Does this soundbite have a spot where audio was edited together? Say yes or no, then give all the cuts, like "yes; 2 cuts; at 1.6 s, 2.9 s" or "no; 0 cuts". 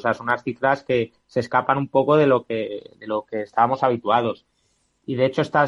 no; 0 cuts